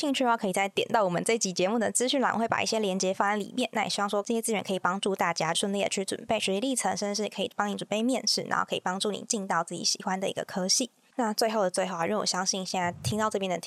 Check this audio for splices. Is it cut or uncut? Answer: uncut